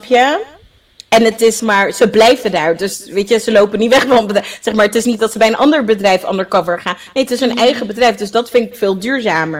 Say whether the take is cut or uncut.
cut